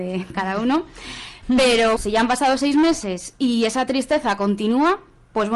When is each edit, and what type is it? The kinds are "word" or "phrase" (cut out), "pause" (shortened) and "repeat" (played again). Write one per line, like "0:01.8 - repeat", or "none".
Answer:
0:02.0 - word